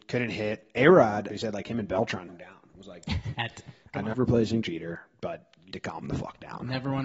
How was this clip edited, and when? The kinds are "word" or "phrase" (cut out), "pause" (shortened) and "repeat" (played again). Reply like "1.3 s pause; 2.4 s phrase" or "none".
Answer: 1.3 s word; 2.3 s word; 3.3 s word; 4.1 s word; 4.6 s word; 5.7 s word